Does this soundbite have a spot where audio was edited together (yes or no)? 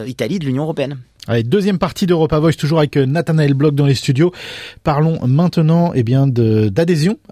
no